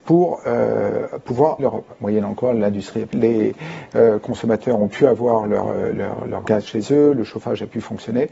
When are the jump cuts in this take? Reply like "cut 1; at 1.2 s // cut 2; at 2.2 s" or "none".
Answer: cut 1; at 1.6 s // cut 2; at 3.1 s